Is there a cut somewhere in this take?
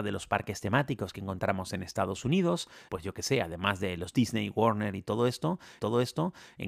yes; 2 cuts; at 2.9 s, 5.8 s

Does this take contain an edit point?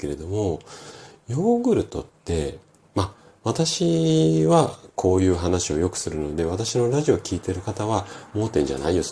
no; 0 cuts

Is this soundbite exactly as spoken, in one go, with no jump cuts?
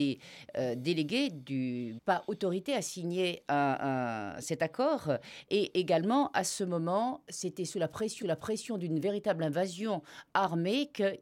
no; 2 cuts; at 2.0 s, 8.2 s

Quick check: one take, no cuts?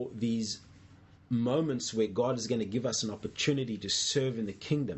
yes; 0 cuts

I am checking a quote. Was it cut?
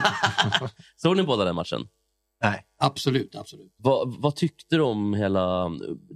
no; 0 cuts

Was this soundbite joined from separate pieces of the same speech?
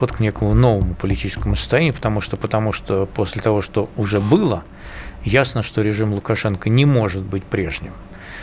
no; 0 cuts

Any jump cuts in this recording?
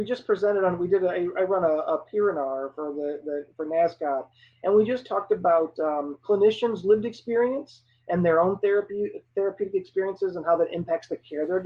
no; 0 cuts

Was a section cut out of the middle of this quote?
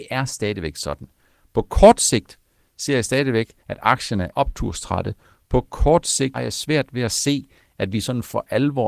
yes; 3 cuts; at 3.6 s, 4.3 s, 6.3 s

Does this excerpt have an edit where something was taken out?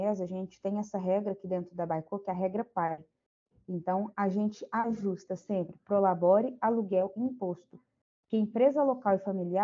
no; 0 cuts

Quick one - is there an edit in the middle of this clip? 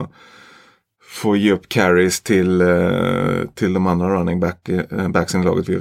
no; 0 cuts

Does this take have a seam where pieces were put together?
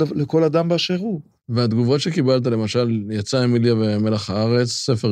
no; 0 cuts

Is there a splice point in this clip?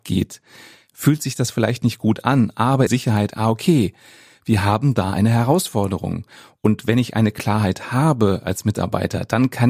yes; 1 cut; at 2.9 s

